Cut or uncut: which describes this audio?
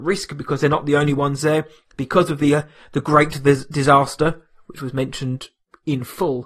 uncut